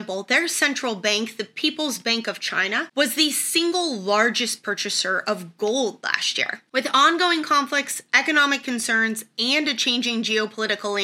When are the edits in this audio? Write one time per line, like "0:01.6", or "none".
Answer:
none

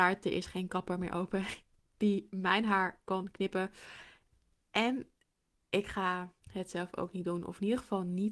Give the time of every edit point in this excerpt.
0:06.4

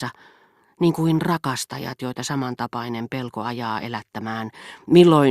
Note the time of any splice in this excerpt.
none

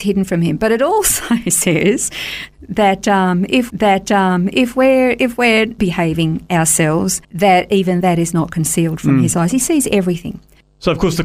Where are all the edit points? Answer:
0:03.7
0:05.8
0:07.2

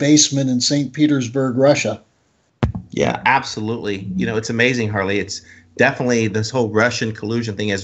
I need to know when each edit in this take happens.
none

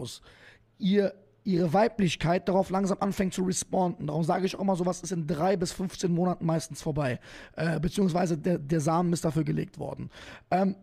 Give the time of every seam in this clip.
none

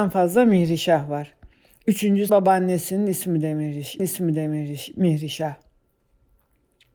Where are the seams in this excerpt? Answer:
0:02.3
0:04.0

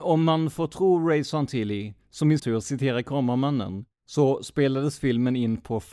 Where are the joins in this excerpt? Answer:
0:02.4
0:03.9

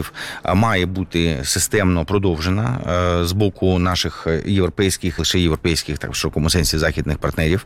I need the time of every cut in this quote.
0:05.2

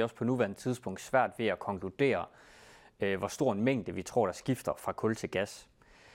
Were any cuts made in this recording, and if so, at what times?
none

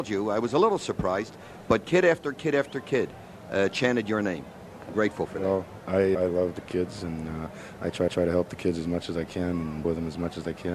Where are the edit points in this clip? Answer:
0:04.9
0:06.1
0:08.1
0:09.8

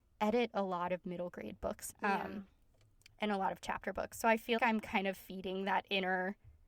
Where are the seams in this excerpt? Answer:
0:01.9
0:04.6

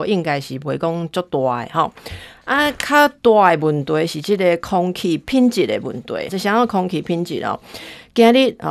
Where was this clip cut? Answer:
0:06.3

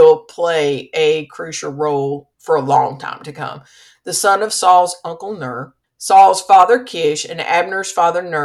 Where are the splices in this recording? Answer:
0:02.3
0:05.8

